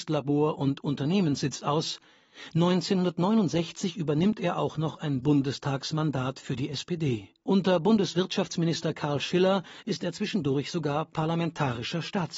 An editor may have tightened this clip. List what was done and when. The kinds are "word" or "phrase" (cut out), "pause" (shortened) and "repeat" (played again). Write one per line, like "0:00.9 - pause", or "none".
0:07.4 - pause